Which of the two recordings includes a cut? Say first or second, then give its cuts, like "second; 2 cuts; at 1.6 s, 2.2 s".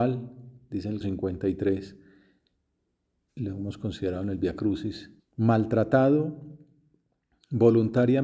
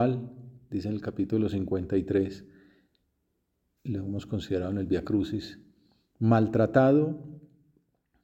first; 2 cuts; at 1.0 s, 5.2 s